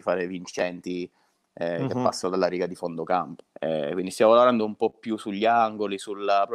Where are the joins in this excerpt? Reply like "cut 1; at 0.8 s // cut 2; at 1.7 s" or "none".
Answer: cut 1; at 3.5 s